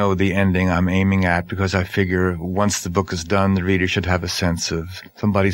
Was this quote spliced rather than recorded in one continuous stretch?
no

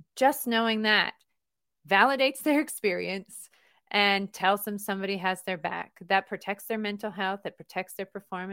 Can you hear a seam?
no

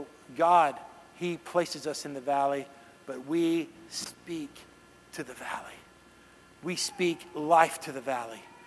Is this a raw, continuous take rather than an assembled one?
yes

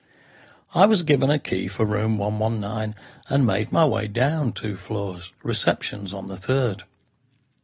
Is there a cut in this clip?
yes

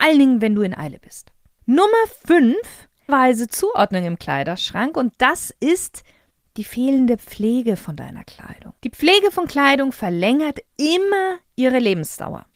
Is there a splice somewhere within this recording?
yes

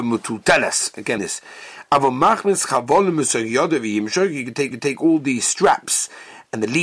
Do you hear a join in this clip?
yes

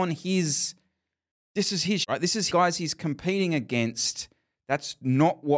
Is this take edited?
yes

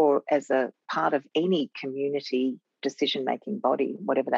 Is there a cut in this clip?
no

